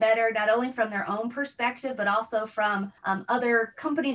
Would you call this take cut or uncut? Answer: cut